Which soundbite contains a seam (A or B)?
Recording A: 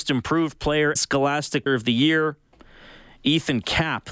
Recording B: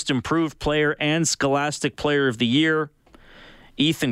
A